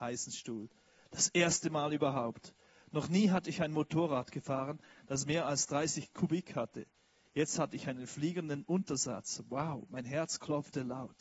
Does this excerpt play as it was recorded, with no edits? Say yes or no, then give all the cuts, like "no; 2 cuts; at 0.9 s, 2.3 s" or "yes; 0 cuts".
yes; 0 cuts